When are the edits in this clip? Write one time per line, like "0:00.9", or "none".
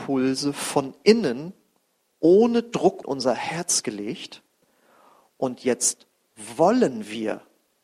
0:03.0